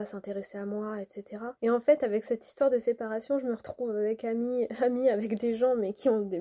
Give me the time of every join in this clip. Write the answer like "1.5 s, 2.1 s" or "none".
1.6 s